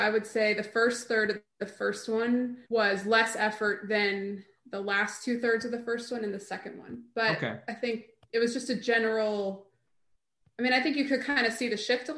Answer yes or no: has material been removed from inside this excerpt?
yes